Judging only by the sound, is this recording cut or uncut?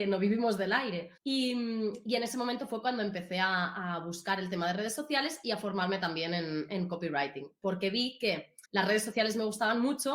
cut